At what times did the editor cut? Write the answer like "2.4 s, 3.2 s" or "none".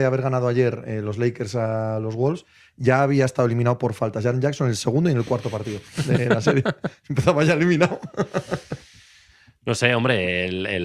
none